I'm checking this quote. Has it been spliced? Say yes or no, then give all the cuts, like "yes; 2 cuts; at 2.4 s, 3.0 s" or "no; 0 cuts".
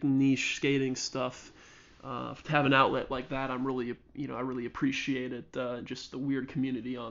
no; 0 cuts